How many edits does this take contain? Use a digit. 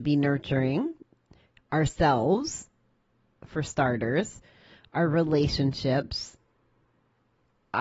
0